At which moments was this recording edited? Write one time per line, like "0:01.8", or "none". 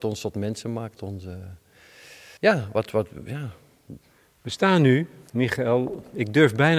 0:01.0
0:02.4
0:04.1
0:05.3